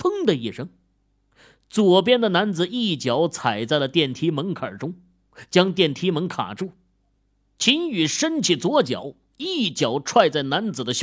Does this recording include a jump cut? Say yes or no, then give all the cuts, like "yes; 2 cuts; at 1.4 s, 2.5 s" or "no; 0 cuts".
no; 0 cuts